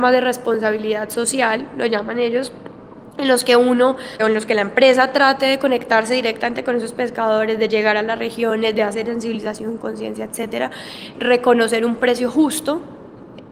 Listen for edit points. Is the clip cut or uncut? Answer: cut